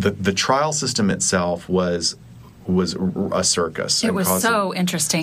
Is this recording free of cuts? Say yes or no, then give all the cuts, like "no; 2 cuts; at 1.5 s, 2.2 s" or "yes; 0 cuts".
yes; 0 cuts